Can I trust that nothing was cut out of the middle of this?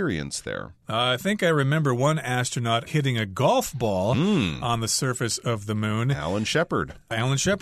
no; 1 cut; at 2.9 s

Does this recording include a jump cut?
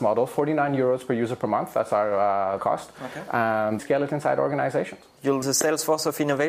yes; 3 cuts; at 2.6 s, 3.8 s, 5.4 s

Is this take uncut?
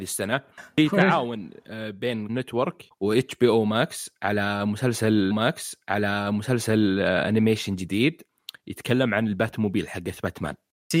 no; 3 cuts; at 2.3 s, 2.9 s, 5.3 s

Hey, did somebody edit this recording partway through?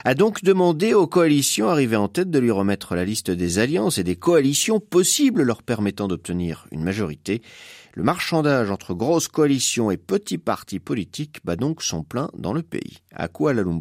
no; 0 cuts

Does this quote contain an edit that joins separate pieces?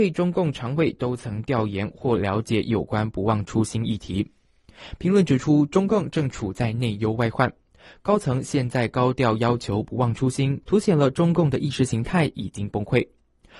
yes; 1 cut; at 10.6 s

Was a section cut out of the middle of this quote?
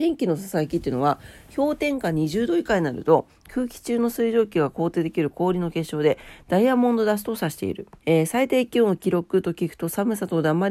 yes; 1 cut; at 8.0 s

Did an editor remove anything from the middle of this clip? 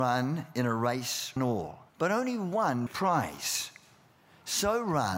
yes; 3 cuts; at 1.4 s, 1.9 s, 2.9 s

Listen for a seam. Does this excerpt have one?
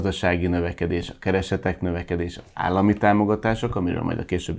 no; 0 cuts

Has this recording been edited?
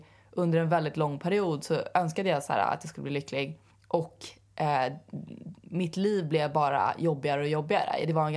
yes; 2 cuts; at 3.7 s, 5.6 s

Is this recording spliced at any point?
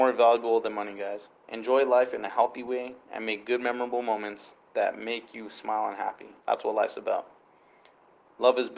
yes; 2 cuts; at 1.4 s, 6.4 s

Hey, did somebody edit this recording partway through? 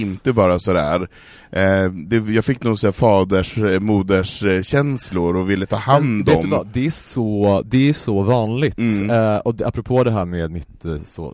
no; 0 cuts

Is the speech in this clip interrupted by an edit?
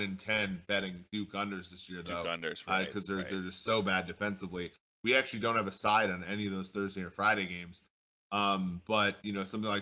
no; 0 cuts

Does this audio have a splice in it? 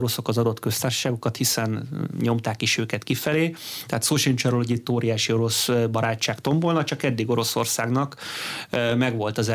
no; 0 cuts

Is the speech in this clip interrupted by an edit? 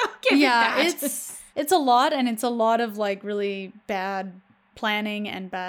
yes; 2 cuts; at 1.5 s, 3.8 s

